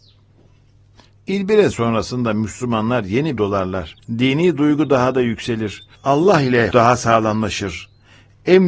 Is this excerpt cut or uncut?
cut